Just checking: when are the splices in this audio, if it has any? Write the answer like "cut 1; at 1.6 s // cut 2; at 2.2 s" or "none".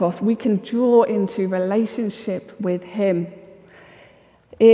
none